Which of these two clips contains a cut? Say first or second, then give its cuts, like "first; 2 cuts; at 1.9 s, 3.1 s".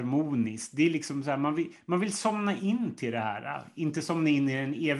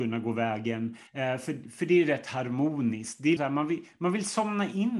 second; 2 cuts; at 1.1 s, 3.4 s